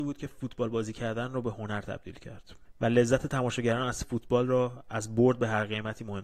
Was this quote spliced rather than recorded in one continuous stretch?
no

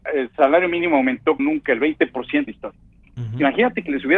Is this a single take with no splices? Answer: no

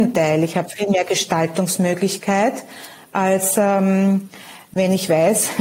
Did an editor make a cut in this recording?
no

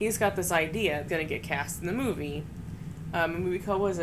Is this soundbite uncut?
no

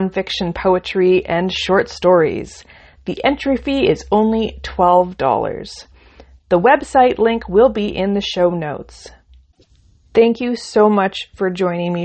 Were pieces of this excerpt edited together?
no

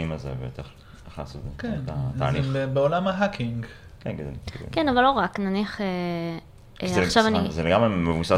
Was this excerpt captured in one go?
yes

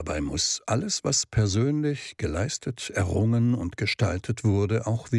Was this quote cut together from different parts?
no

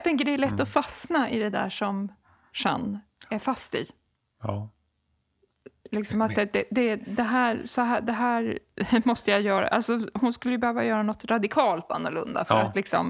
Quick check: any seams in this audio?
no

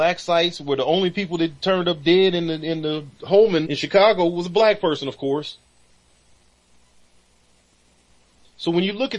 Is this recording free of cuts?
no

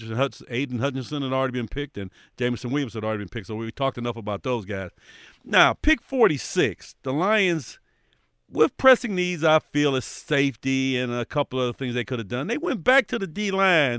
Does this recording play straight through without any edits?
yes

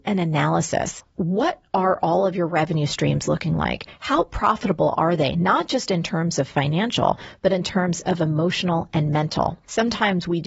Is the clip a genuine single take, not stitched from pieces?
yes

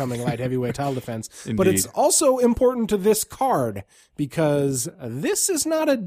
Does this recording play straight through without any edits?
yes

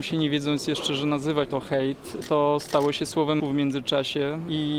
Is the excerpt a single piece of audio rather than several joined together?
no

